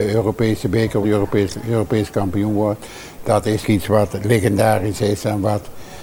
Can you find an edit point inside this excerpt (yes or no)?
yes